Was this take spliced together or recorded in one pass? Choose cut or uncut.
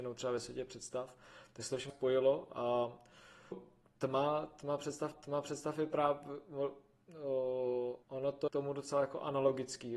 cut